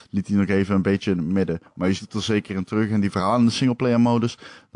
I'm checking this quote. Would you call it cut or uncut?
cut